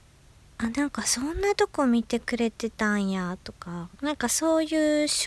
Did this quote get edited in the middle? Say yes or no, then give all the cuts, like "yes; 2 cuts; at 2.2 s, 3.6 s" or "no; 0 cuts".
yes; 1 cut; at 3.9 s